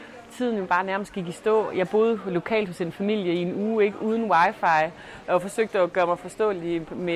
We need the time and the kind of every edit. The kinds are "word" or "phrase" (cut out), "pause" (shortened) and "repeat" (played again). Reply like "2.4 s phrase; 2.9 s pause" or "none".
none